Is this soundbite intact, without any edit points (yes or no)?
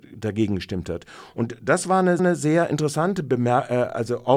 no